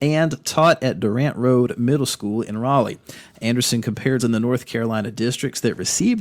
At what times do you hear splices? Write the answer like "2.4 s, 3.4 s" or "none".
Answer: 4.2 s